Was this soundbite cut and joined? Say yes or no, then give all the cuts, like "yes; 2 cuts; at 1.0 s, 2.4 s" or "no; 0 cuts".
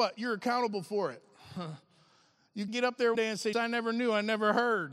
yes; 3 cuts; at 2.7 s, 3.1 s, 3.5 s